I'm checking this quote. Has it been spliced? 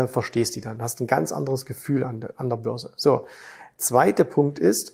no; 0 cuts

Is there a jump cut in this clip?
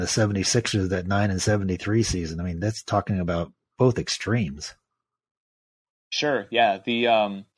no; 0 cuts

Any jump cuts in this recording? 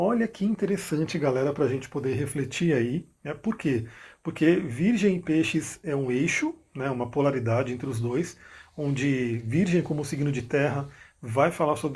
no; 0 cuts

